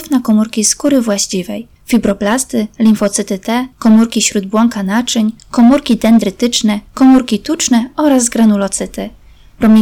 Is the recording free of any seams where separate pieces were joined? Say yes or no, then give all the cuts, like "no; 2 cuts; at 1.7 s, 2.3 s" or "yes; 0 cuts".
no; 4 cuts; at 1.8 s, 3.7 s, 5.4 s, 6.9 s